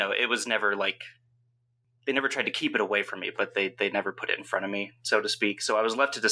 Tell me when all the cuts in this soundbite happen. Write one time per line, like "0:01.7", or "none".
none